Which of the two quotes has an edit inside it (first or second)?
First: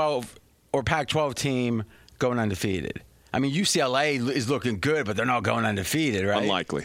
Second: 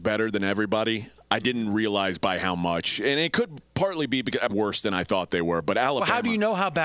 second